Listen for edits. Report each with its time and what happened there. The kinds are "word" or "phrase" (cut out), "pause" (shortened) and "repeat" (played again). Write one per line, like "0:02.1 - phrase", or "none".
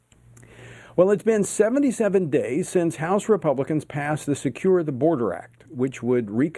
0:05.7 - pause